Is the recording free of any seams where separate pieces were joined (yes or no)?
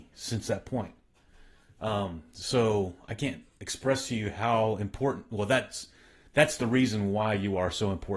yes